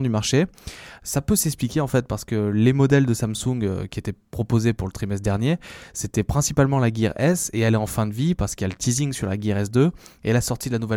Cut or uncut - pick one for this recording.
uncut